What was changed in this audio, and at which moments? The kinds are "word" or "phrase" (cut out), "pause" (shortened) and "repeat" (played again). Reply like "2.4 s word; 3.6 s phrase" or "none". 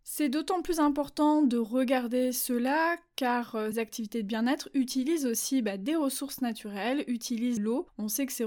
3.7 s word; 7.6 s word